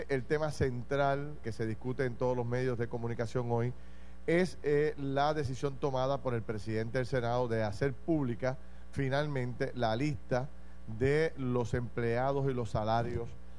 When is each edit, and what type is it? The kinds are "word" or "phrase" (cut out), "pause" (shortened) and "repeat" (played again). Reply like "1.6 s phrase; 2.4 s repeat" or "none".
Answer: 1.4 s word